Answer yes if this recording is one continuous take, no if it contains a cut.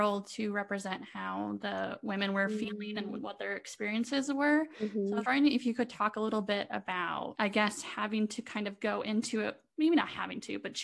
yes